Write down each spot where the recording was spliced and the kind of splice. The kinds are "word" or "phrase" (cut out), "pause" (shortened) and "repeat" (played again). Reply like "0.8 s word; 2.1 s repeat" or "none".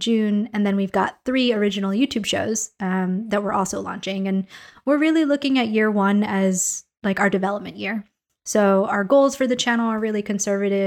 none

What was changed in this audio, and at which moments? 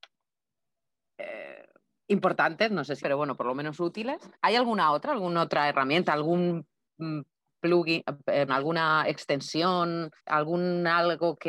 3.0 s word; 4.3 s pause; 8.5 s word; 10.2 s pause

